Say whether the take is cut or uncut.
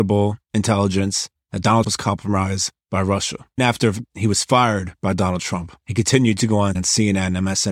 cut